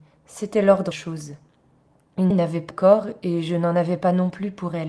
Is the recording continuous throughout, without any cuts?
no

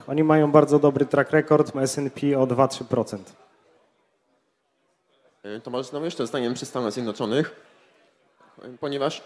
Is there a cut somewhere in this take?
yes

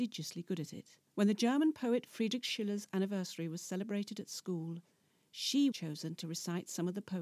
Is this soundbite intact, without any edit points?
no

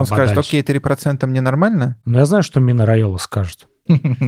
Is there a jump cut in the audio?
no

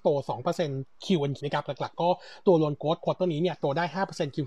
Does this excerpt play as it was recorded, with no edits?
no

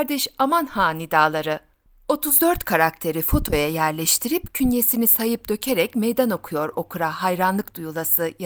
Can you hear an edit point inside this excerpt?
no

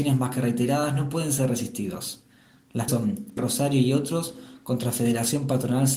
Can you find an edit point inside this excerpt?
yes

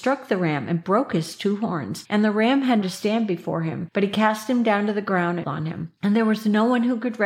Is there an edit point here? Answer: yes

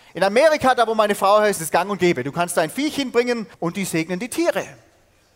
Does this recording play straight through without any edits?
no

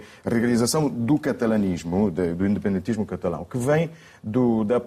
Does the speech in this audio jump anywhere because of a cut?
no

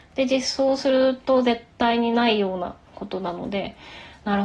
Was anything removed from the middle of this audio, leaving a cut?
yes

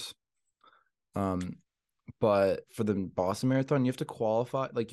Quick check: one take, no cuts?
yes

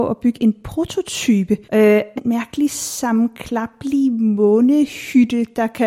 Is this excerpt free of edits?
no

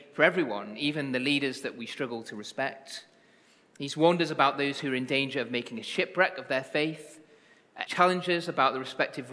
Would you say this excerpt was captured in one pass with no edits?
no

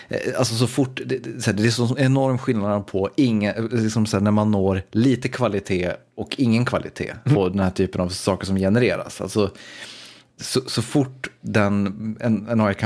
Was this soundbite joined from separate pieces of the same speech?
yes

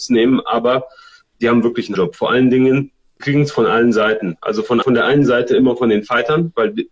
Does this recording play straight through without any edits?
no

